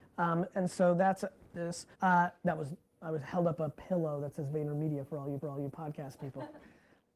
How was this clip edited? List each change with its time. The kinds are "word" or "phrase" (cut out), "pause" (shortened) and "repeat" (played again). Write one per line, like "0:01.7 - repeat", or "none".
0:01.9 - pause
0:05.4 - repeat